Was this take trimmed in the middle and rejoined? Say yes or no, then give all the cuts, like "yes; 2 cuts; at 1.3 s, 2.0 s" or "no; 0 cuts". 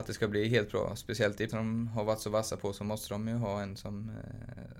yes; 1 cut; at 1.5 s